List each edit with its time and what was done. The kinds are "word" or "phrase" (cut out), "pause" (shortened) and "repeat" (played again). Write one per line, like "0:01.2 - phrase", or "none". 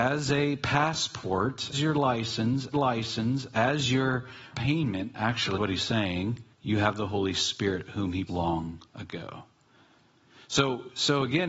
0:01.7 - word
0:02.7 - repeat
0:04.5 - phrase
0:05.6 - word
0:06.5 - pause
0:08.3 - word
0:08.9 - pause